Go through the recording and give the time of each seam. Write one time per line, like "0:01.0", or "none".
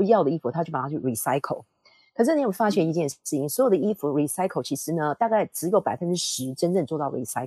none